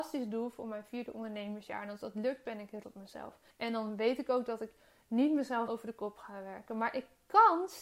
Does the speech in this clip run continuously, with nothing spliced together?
no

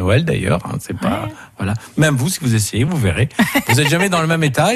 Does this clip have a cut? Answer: no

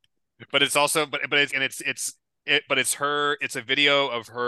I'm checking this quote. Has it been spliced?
yes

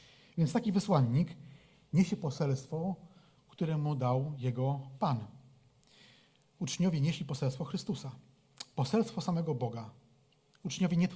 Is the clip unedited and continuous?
yes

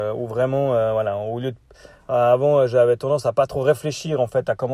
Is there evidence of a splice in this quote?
no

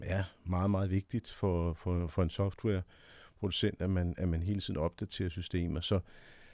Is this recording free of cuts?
yes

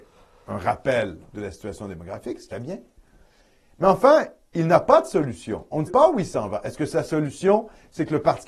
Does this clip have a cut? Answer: yes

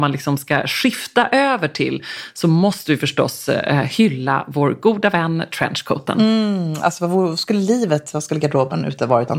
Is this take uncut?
yes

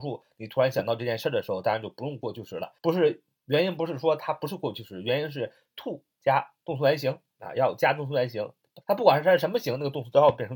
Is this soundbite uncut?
no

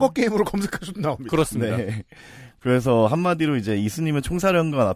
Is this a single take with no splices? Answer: yes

